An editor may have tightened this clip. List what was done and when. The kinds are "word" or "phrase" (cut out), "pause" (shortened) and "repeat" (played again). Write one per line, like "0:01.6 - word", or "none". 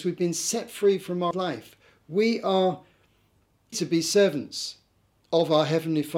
0:01.3 - word
0:03.7 - word